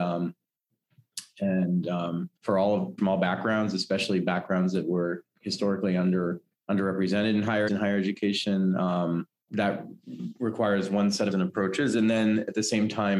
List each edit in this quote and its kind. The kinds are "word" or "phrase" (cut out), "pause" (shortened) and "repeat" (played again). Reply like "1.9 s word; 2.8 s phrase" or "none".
2.4 s pause; 3.0 s phrase; 6.5 s pause; 7.7 s phrase; 9.5 s word; 11.3 s word